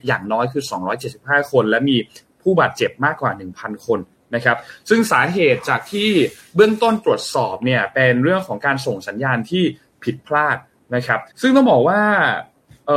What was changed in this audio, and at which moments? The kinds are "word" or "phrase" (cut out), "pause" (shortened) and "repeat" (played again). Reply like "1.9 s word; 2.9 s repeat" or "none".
11.3 s pause